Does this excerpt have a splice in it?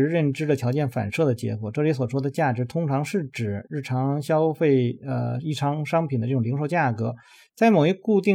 no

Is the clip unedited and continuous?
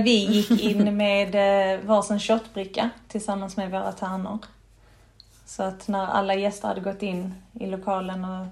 yes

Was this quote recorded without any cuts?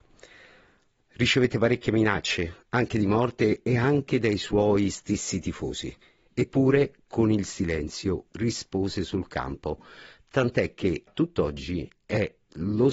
no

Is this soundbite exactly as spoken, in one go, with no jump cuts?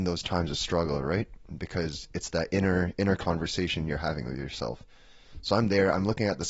yes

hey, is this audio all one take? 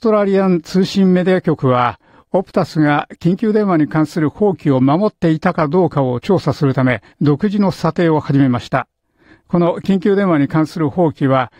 no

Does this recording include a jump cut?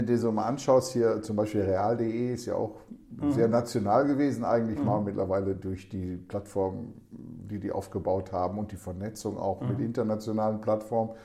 no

